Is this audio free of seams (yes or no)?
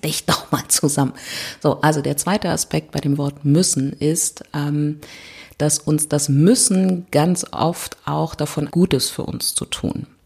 no